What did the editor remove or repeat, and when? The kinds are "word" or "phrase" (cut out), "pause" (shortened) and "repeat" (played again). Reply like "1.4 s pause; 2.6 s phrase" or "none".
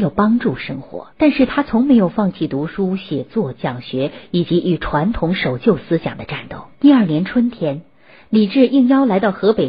1.1 s pause; 6.7 s pause